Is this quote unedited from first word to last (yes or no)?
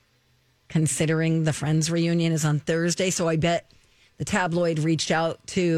yes